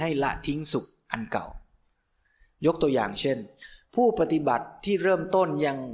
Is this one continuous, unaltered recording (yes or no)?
yes